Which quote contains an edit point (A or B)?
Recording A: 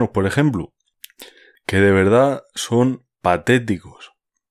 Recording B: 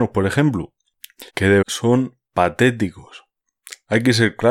B